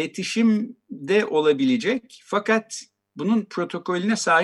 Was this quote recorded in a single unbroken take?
yes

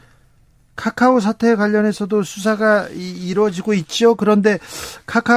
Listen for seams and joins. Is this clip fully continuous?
yes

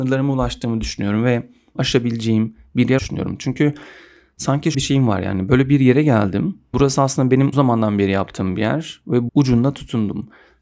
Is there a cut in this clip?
yes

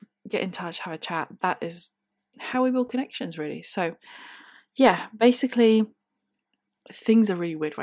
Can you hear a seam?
no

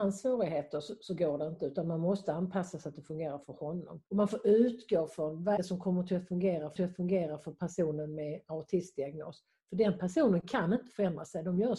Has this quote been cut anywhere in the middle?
yes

